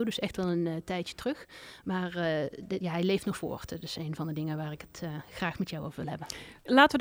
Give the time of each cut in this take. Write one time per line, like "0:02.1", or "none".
0:03.3